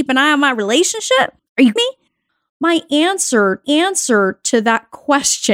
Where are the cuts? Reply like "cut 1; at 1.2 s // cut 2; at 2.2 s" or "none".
cut 1; at 1.4 s // cut 2; at 1.8 s // cut 3; at 3.6 s